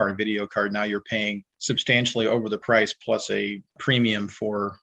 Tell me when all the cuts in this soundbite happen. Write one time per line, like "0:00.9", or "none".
none